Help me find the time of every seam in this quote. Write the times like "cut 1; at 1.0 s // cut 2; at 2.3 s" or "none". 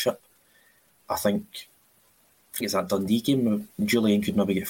cut 1; at 2.6 s